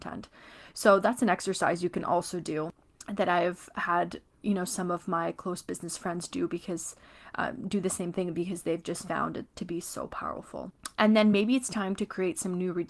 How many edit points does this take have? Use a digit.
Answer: 0